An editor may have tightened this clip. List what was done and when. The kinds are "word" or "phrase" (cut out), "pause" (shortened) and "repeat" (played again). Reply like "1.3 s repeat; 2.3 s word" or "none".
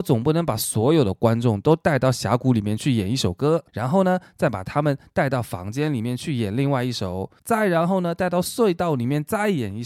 3.7 s pause; 7.4 s pause